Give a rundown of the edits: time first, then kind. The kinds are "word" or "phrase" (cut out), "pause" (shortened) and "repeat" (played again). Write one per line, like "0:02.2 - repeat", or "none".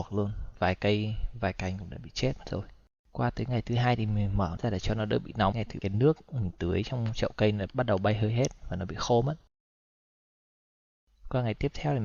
0:02.9 - pause
0:04.6 - word
0:05.5 - phrase
0:05.8 - phrase
0:07.7 - word